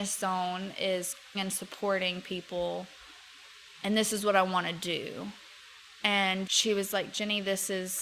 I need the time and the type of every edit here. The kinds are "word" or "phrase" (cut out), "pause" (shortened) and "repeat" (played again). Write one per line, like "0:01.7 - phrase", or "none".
0:01.3 - word
0:06.5 - word